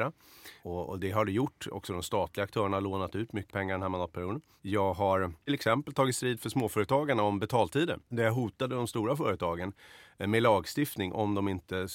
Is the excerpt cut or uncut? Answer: cut